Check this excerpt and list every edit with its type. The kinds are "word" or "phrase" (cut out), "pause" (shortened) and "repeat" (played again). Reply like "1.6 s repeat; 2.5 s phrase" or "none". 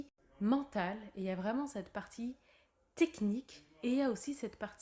none